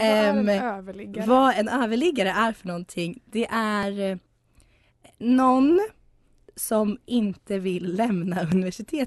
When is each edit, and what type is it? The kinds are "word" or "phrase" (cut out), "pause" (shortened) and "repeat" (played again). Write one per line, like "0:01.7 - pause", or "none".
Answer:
none

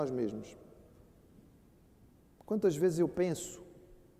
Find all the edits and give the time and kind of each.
none

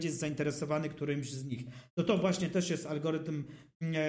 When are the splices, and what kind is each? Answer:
none

